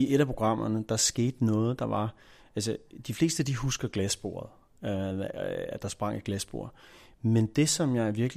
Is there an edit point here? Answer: no; 0 cuts

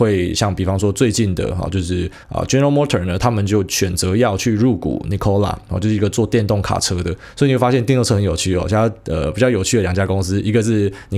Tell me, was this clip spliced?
yes; 1 cut; at 2.2 s

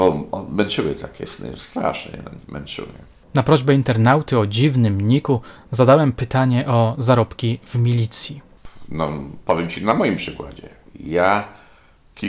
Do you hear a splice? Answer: no; 0 cuts

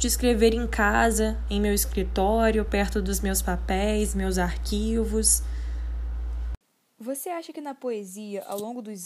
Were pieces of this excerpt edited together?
no; 0 cuts

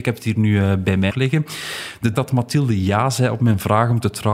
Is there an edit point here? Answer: yes; 2 cuts; at 1.1 s, 2.1 s

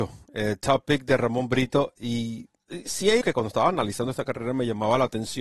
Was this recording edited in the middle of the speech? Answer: yes; 1 cut; at 3.2 s

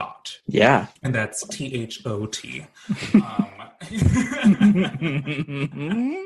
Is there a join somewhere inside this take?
yes; 1 cut; at 1.0 s

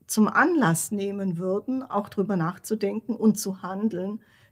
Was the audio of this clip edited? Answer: no; 0 cuts

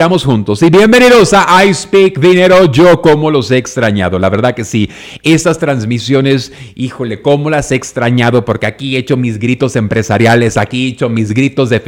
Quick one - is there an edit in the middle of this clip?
no; 0 cuts

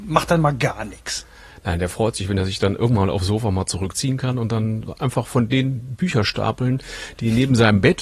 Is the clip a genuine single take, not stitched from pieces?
yes; 0 cuts

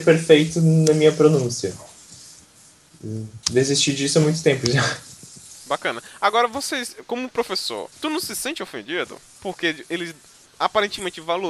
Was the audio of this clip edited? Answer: yes; 2 cuts; at 3.4 s, 7.9 s

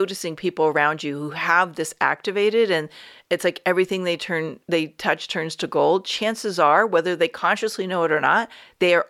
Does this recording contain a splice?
no; 0 cuts

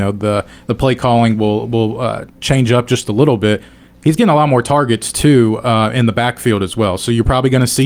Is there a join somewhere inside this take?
no; 0 cuts

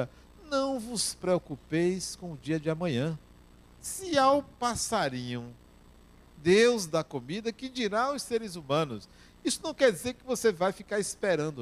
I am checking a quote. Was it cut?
no; 0 cuts

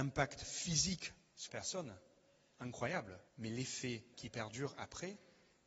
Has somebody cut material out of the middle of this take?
yes; 3 cuts; at 1.5 s, 3.3 s, 4.1 s

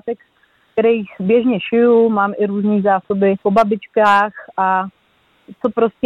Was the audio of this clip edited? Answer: yes; 1 cut; at 3.4 s

